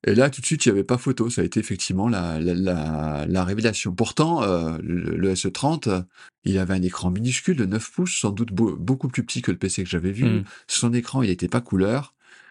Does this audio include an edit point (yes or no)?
yes